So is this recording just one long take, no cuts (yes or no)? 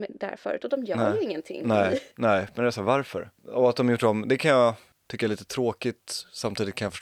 yes